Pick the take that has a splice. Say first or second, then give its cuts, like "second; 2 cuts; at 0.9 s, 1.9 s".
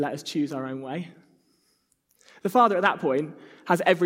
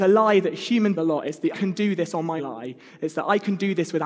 second; 3 cuts; at 1.0 s, 1.5 s, 2.4 s